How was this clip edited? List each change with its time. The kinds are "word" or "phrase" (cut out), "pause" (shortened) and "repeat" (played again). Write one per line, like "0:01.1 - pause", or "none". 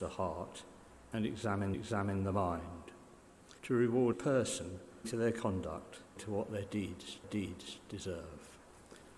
0:01.7 - repeat
0:03.6 - pause
0:04.1 - word
0:05.0 - word
0:06.2 - word
0:07.2 - repeat